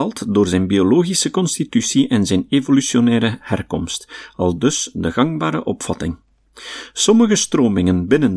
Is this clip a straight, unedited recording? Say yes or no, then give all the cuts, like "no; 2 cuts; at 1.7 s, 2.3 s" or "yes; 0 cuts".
yes; 0 cuts